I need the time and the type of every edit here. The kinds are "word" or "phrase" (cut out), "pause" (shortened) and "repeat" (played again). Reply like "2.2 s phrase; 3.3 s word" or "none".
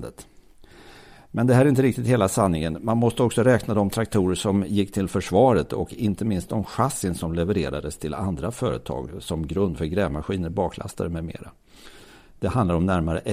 none

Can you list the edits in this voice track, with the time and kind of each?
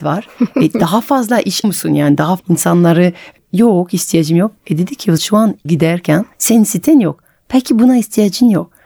1.6 s word; 2.4 s word; 5.2 s word; 5.7 s phrase; 6.3 s pause

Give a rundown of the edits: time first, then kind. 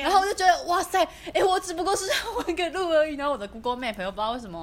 none

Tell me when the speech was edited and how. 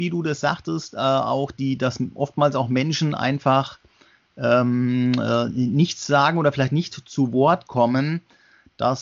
none

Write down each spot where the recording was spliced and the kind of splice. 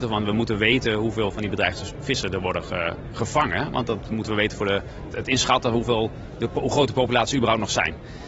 5.1 s word

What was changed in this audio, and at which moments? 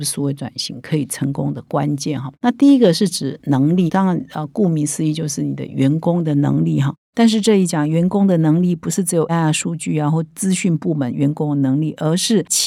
3.9 s word; 9.3 s word

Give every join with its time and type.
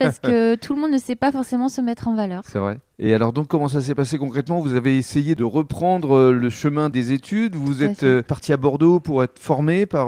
none

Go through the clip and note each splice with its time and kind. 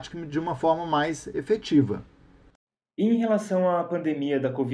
none

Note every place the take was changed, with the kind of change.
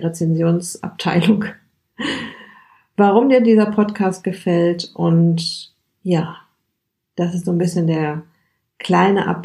none

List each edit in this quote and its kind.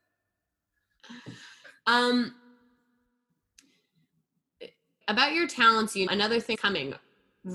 5.0 s word; 6.1 s word; 6.5 s word

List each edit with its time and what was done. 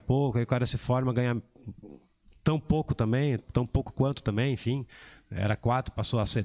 3.4 s word

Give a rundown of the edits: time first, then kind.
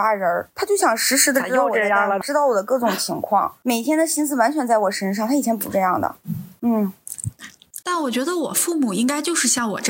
2.2 s word; 7.8 s pause

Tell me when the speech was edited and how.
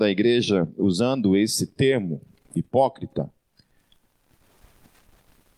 none

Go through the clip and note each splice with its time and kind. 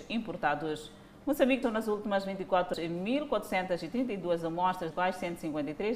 1.6 s word; 2.7 s word; 4.9 s word

